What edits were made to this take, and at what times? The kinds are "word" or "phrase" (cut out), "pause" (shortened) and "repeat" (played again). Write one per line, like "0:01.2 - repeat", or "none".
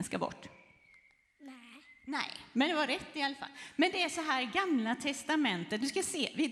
none